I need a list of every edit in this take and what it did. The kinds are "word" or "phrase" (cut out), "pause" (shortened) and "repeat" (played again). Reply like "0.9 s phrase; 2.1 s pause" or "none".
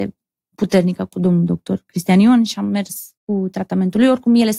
3.2 s pause